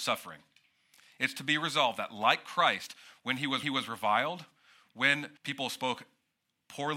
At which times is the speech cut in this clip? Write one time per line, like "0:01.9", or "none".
0:03.6
0:05.4